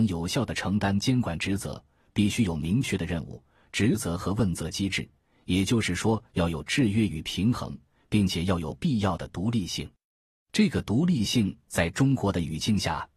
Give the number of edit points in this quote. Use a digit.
0